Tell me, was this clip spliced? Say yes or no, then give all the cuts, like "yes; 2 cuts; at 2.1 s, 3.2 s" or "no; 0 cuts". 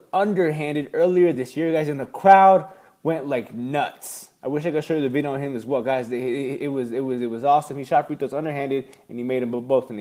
no; 0 cuts